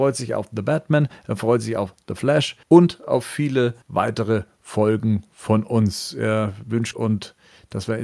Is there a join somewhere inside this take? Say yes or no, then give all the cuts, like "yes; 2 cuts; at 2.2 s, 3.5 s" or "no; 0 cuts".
yes; 3 cuts; at 2.6 s, 3.8 s, 6.9 s